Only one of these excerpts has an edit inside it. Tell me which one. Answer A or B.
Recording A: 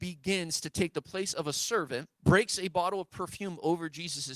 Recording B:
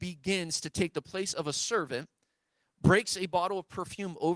A